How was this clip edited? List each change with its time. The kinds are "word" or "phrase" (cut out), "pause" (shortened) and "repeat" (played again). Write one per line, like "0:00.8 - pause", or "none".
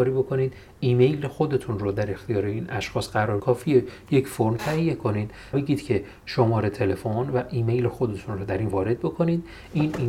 0:03.4 - word
0:05.5 - word
0:08.7 - word